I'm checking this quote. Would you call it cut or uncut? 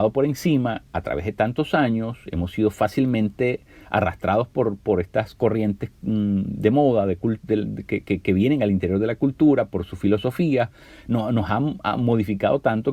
uncut